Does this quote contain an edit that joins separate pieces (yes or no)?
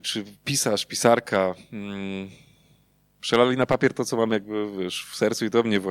no